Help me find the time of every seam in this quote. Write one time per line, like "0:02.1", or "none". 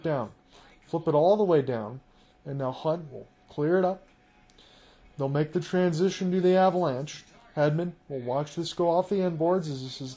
none